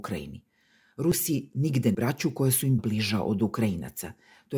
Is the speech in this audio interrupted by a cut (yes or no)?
yes